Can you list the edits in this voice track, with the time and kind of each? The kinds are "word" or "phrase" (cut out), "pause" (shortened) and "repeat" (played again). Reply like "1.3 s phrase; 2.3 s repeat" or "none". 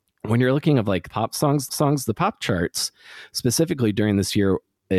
1.1 s phrase; 1.7 s repeat